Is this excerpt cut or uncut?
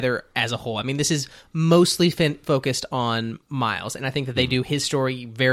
uncut